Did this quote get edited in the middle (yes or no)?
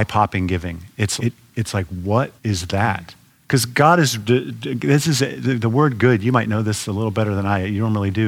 yes